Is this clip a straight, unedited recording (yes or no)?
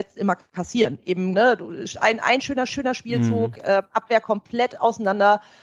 no